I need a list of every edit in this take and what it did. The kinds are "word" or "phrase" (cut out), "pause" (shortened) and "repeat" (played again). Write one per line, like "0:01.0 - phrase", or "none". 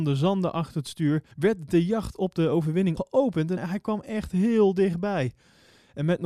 0:01.3 - pause
0:03.0 - word
0:03.6 - word